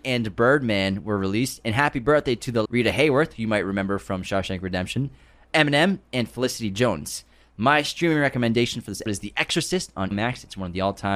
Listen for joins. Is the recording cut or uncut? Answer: cut